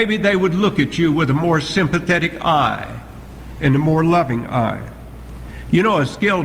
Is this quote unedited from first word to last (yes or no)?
yes